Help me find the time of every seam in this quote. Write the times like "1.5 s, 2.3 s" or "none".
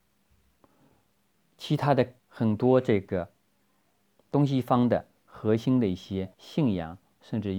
2.2 s, 6.3 s